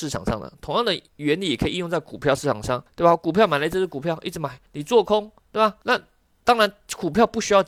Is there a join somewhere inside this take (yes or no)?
yes